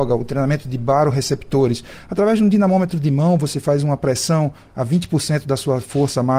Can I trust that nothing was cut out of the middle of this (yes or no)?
yes